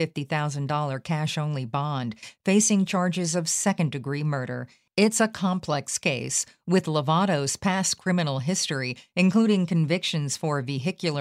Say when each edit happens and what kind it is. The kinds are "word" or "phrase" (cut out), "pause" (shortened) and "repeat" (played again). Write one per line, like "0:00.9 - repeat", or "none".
none